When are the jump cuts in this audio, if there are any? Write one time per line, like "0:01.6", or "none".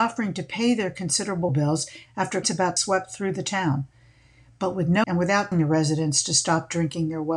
0:01.5
0:02.4
0:02.8
0:05.0
0:05.5